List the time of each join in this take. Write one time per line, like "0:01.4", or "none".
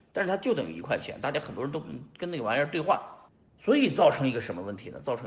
0:03.3